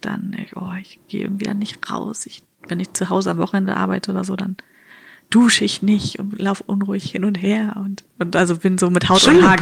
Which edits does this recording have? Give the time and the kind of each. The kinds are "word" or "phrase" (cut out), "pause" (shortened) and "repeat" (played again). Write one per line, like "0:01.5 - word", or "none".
none